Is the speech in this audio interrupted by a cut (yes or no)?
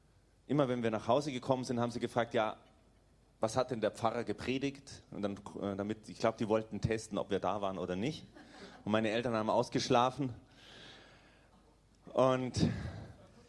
no